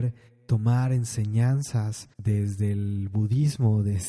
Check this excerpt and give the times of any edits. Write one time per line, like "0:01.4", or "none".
0:02.1